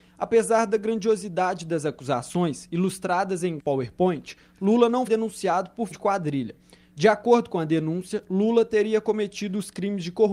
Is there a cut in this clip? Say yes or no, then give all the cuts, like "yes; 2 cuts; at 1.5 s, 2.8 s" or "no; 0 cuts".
yes; 3 cuts; at 3.6 s, 5.1 s, 5.9 s